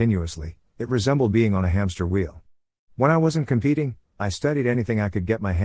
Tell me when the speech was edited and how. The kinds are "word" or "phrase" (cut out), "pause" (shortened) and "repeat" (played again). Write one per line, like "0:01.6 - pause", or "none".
none